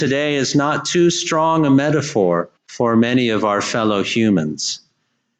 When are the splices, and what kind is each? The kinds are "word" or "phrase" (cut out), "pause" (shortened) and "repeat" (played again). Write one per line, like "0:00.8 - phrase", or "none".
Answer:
0:02.6 - pause